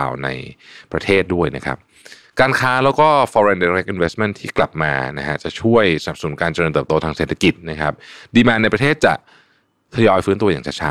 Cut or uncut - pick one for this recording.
uncut